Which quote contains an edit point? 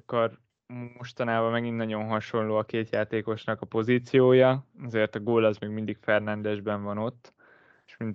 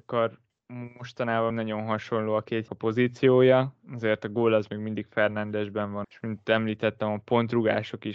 second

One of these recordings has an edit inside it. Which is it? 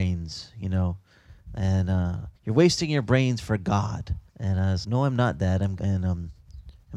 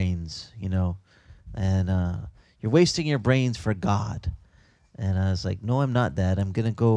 first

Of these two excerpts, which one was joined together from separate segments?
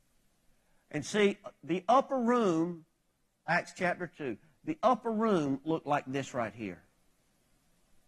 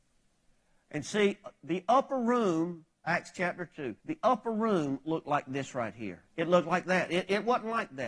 second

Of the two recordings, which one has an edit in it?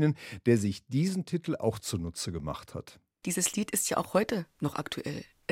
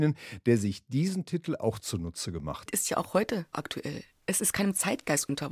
second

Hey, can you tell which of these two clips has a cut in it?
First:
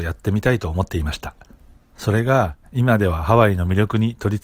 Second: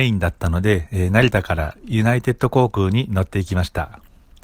first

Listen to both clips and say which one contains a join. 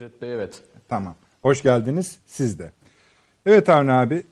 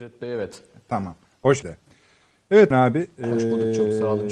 second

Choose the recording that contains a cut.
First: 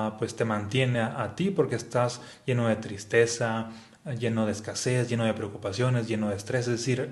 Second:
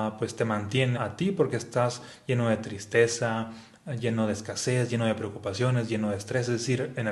second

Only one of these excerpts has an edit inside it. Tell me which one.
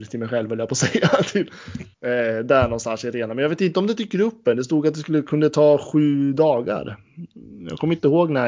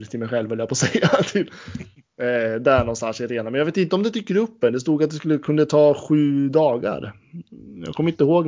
first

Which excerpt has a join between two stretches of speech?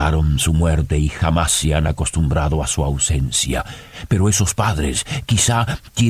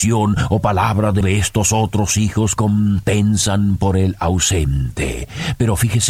second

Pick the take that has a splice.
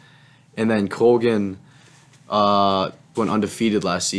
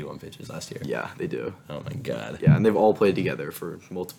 first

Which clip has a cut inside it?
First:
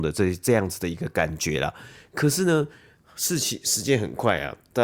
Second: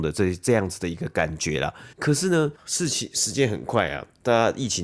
second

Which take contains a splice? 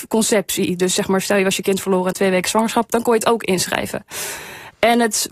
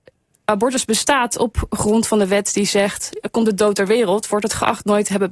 first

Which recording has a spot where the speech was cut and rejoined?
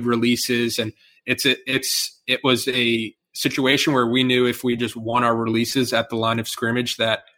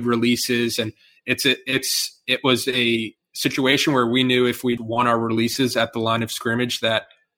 second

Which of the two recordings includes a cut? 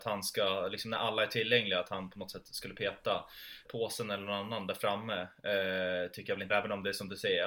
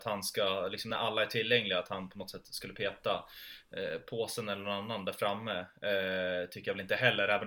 first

